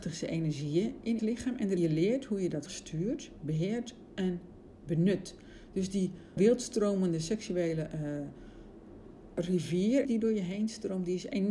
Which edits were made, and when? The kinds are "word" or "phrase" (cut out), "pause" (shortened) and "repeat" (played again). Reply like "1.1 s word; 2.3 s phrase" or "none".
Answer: 1.2 s word; 1.8 s phrase; 2.7 s word; 6.4 s word; 10.0 s word